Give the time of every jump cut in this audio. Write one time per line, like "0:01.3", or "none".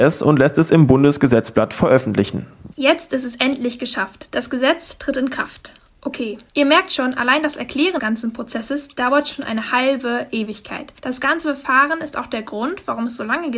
0:02.7
0:06.5
0:08.0
0:11.0